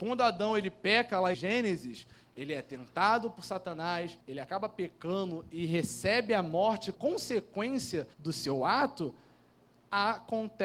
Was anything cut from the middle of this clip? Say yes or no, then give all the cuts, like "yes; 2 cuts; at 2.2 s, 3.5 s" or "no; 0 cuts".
yes; 4 cuts; at 1.3 s, 4.2 s, 6.9 s, 8.1 s